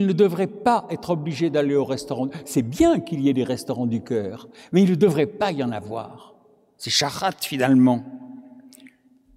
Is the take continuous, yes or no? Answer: yes